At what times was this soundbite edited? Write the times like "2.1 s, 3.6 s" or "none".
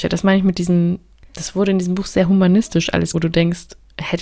3.1 s

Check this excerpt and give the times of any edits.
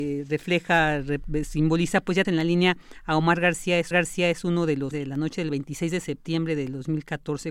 2.2 s, 3.9 s, 4.9 s

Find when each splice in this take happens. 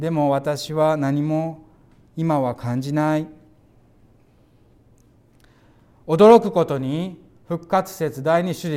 none

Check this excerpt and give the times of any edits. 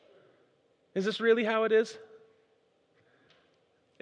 none

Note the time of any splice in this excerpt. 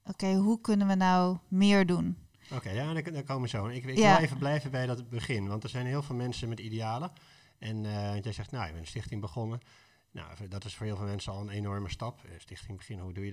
none

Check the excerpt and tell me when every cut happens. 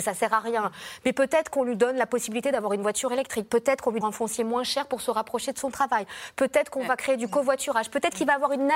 4.0 s

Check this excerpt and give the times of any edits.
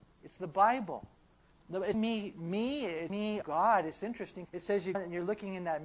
1.9 s, 3.1 s, 3.4 s, 4.5 s, 4.9 s

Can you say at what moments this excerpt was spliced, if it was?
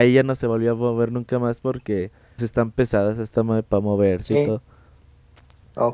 2.4 s, 3.4 s

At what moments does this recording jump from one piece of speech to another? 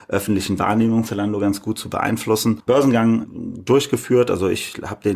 1.0 s, 2.7 s

